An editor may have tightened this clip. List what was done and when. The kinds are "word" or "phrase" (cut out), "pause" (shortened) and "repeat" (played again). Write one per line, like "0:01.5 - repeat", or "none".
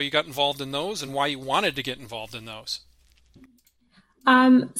none